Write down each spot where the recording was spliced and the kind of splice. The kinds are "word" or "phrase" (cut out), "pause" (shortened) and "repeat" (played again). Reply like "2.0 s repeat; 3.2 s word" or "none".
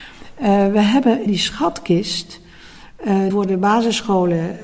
1.3 s word; 3.3 s word